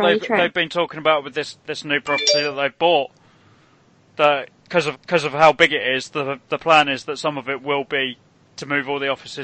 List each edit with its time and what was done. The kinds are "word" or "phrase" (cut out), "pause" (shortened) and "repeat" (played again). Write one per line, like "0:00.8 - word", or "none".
0:01.6 - pause
0:04.9 - repeat
0:08.3 - pause